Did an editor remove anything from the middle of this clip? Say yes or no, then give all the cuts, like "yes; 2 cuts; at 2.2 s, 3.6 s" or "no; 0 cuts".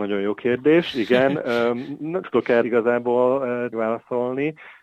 yes; 3 cuts; at 2.2 s, 2.6 s, 3.7 s